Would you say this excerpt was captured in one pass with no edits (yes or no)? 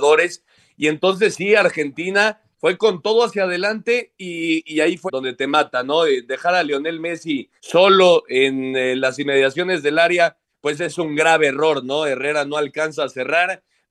no